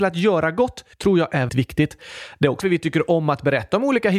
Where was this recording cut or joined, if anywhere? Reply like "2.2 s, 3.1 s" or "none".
0.9 s, 1.5 s, 2.6 s